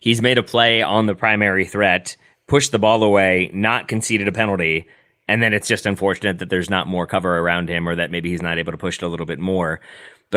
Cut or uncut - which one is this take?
uncut